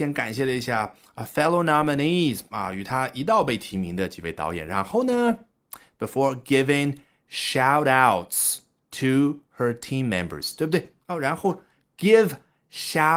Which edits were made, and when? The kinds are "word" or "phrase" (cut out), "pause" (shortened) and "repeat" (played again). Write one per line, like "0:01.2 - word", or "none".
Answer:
0:11.0 - pause